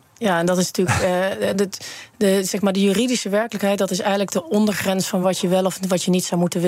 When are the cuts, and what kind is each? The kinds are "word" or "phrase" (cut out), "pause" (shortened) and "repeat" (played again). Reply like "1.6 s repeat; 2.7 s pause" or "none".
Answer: none